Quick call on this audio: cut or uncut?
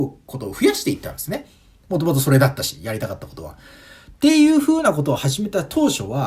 uncut